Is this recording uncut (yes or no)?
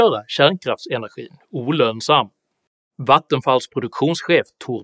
yes